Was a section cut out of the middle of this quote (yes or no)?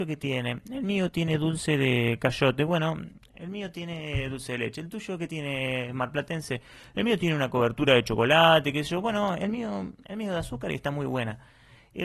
no